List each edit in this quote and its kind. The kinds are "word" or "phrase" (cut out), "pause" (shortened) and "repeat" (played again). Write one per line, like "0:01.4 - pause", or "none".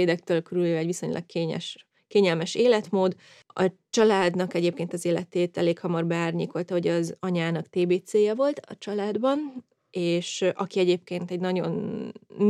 none